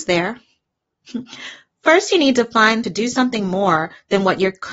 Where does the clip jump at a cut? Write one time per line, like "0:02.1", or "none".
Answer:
0:02.8